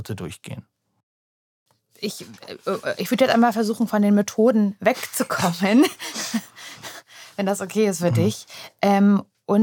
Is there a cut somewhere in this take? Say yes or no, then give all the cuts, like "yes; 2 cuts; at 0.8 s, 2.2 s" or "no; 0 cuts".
no; 0 cuts